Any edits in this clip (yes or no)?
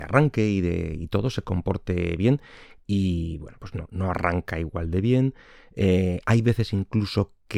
no